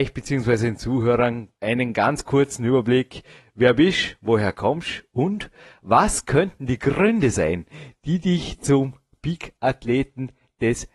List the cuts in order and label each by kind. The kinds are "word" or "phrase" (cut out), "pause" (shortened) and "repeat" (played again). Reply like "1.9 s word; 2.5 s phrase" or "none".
1.6 s pause